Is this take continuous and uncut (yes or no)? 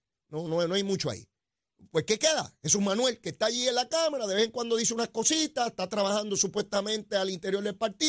yes